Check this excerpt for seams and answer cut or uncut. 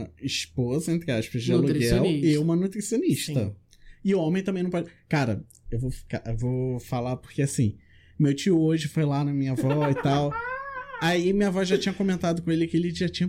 uncut